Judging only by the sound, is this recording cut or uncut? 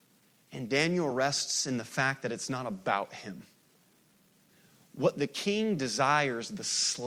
uncut